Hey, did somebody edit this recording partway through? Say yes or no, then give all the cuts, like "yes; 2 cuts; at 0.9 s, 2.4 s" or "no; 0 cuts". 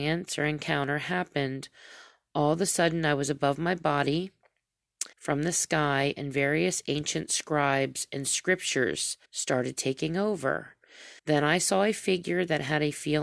yes; 3 cuts; at 5.1 s, 9.3 s, 11.2 s